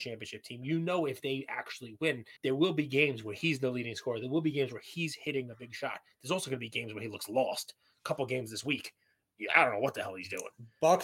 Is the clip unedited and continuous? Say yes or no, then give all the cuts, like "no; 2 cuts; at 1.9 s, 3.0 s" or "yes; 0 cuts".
no; 1 cut; at 2.4 s